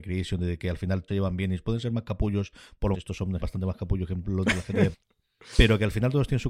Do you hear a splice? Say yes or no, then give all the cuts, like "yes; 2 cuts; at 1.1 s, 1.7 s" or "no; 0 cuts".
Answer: yes; 4 cuts; at 1.1 s, 2.9 s, 3.4 s, 4.9 s